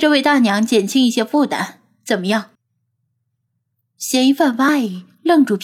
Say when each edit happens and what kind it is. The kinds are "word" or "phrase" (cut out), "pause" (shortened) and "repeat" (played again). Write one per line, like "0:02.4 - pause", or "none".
0:02.5 - pause